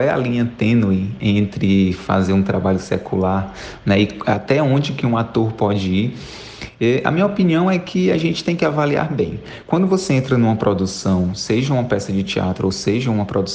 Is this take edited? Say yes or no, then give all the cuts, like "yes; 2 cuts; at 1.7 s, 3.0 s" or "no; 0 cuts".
no; 0 cuts